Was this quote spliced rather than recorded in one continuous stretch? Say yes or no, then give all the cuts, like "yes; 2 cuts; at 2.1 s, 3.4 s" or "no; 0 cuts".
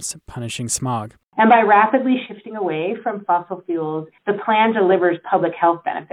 yes; 1 cut; at 4.2 s